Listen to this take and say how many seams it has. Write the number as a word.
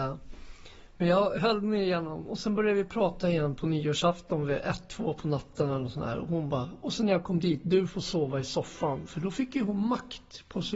zero